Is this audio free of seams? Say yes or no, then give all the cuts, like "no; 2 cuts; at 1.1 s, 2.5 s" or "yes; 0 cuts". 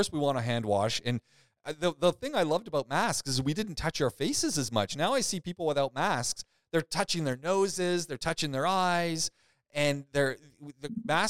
yes; 0 cuts